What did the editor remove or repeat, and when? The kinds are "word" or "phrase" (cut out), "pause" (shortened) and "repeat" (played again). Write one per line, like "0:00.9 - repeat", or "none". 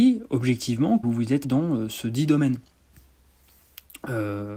0:01.0 - word
0:01.4 - word